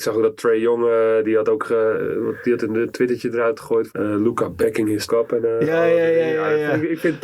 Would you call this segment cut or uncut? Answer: cut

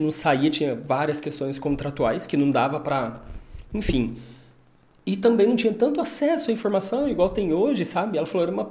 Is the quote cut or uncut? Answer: uncut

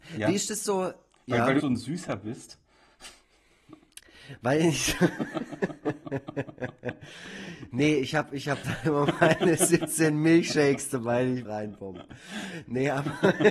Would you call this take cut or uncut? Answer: cut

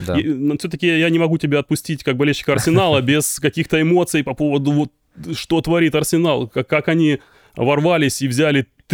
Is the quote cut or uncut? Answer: uncut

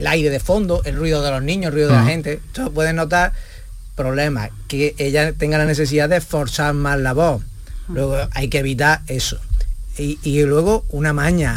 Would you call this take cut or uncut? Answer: uncut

